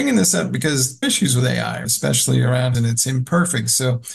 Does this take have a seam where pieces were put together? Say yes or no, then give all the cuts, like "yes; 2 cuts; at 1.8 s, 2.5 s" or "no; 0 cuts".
yes; 3 cuts; at 1.0 s, 1.8 s, 2.7 s